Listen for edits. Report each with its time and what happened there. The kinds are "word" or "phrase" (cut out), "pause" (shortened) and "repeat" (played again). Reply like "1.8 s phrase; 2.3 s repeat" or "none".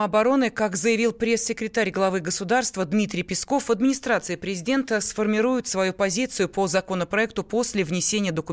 none